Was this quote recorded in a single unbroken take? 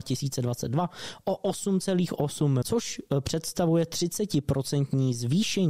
no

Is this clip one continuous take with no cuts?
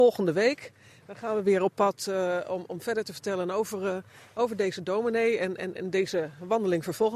yes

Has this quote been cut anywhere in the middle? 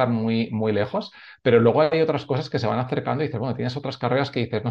no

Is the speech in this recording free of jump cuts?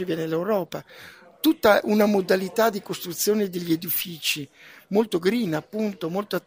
yes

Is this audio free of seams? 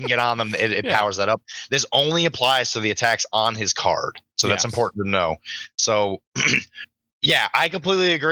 no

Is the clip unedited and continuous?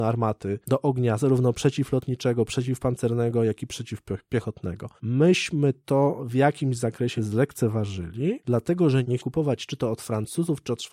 no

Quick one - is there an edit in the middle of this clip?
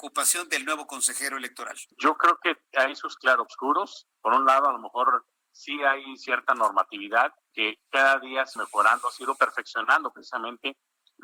yes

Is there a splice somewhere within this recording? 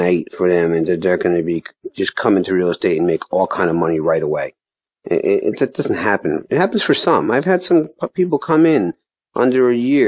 no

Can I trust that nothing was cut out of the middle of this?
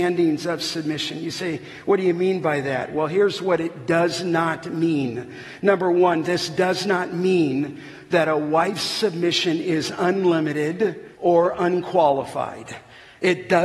no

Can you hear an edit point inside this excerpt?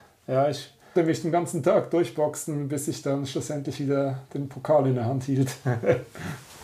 yes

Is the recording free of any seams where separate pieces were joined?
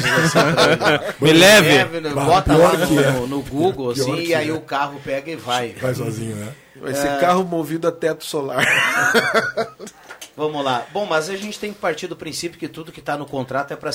yes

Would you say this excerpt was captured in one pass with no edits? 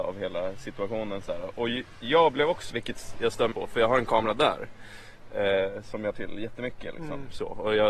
no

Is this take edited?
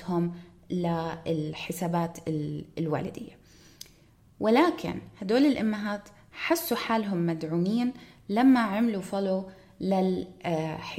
no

